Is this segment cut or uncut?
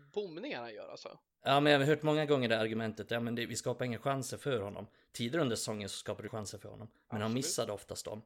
cut